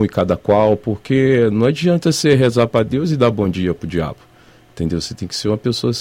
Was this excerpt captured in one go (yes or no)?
yes